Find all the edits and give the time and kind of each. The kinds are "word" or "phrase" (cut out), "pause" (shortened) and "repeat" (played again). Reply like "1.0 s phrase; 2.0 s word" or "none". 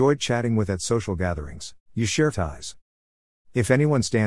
1.8 s pause; 2.3 s word

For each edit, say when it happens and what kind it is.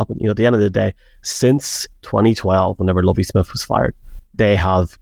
none

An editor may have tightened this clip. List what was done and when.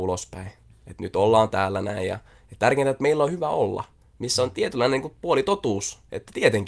none

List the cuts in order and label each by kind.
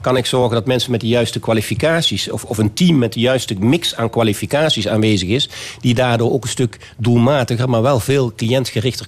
none

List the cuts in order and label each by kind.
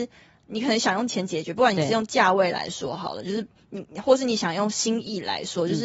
none

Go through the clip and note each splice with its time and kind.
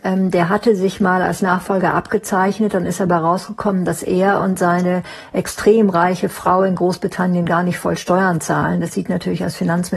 none

